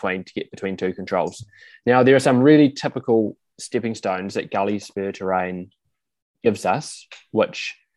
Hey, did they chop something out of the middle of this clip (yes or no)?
no